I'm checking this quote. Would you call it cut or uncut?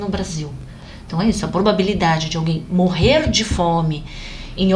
uncut